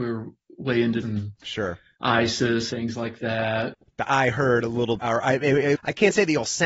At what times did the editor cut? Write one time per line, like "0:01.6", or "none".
0:01.0
0:02.7
0:04.1
0:05.0
0:05.7